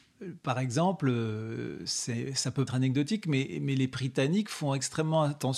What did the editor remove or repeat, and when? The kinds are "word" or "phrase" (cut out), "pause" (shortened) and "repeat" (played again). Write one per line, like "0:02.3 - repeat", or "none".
0:02.7 - word